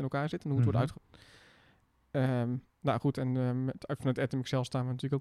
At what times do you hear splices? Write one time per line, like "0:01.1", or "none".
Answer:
0:00.9
0:02.7